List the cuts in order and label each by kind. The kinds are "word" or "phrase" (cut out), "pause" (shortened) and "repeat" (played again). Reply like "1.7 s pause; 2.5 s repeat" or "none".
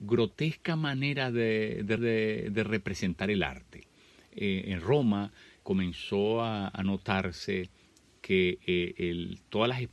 2.0 s repeat; 5.6 s word

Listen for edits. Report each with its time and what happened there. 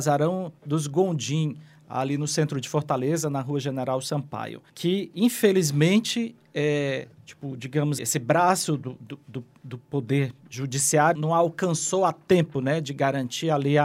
4.7 s pause; 7.1 s pause; 8.0 s word; 11.1 s word

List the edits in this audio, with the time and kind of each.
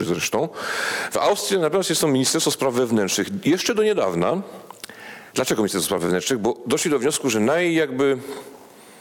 none

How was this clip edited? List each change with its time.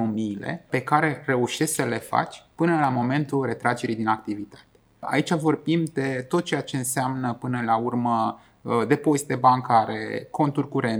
none

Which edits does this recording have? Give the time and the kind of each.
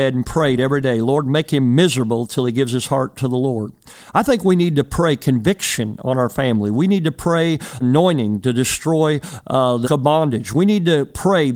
7.8 s word; 9.4 s word; 9.8 s word

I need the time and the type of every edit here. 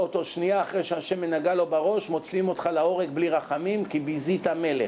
none

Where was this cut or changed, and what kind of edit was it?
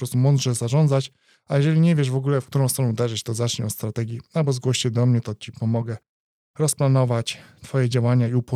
none

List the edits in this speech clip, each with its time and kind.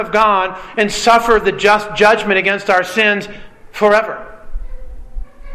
none

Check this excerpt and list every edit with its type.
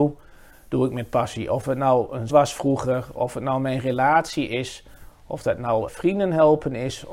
2.3 s word; 5.9 s word

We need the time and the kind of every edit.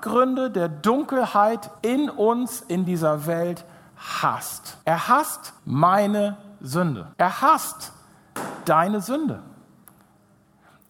1.8 s pause; 4.8 s pause; 5.6 s pause; 7.1 s pause

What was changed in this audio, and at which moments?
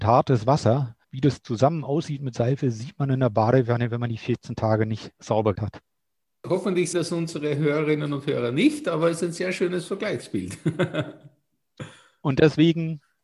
1.0 s pause; 5.5 s word; 6.9 s word

